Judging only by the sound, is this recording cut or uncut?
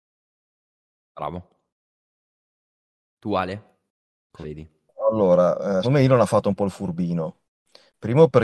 cut